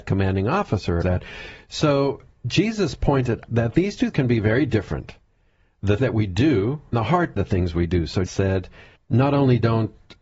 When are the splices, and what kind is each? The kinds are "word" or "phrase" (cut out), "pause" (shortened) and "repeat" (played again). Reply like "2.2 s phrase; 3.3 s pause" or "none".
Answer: 1.0 s word; 3.4 s word; 4.1 s word; 6.0 s word; 6.9 s word; 7.4 s word; 8.3 s word; 9.0 s word